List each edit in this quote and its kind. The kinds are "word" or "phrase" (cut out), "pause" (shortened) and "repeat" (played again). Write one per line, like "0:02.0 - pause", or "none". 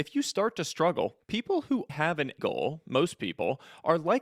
0:01.2 - pause
0:01.9 - word
0:02.4 - word